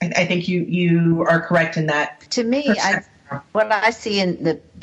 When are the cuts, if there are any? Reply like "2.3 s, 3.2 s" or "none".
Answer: 2.3 s